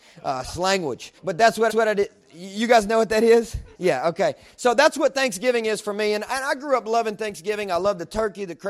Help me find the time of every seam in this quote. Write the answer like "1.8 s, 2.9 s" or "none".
1.2 s, 1.7 s, 3.7 s